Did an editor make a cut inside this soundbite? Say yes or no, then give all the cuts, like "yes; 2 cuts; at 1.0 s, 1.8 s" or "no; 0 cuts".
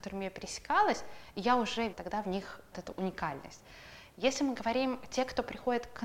yes; 2 cuts; at 1.9 s, 2.7 s